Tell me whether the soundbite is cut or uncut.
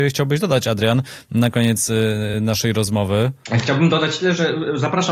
uncut